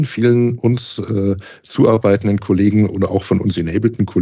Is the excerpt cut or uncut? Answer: uncut